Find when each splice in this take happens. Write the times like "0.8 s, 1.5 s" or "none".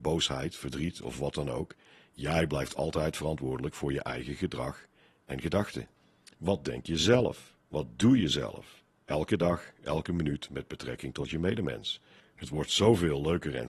none